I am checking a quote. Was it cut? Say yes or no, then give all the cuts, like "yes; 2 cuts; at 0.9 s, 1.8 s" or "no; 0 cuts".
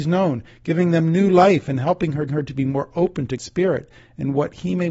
yes; 2 cuts; at 2.3 s, 3.4 s